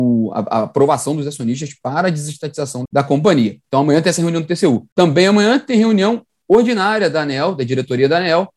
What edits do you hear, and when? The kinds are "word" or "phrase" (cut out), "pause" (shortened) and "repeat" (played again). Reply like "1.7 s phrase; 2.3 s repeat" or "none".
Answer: 2.9 s word; 4.9 s pause